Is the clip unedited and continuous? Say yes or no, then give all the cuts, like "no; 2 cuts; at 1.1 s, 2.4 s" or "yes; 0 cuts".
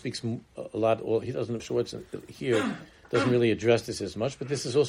no; 1 cut; at 1.6 s